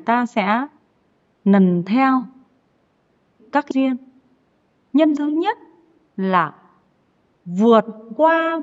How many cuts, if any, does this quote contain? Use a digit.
3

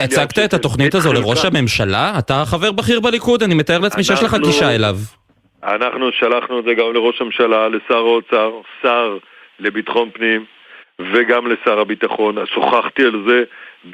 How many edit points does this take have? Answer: 0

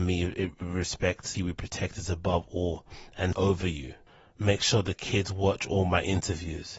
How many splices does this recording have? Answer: 3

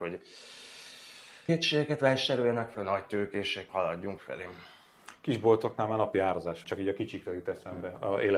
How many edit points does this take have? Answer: 5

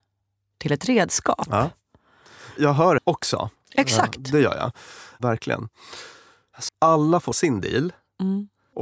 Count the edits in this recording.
3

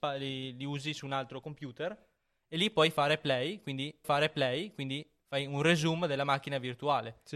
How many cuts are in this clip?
1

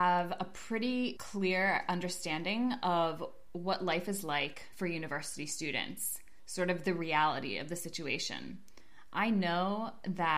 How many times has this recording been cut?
0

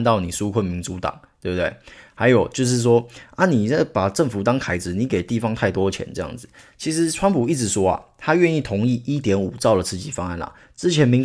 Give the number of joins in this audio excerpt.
0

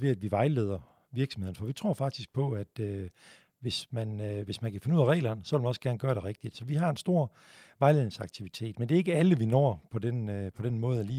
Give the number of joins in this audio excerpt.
0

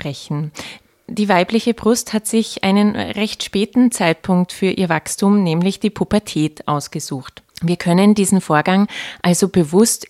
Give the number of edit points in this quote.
1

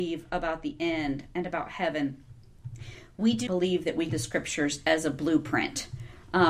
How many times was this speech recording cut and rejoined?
2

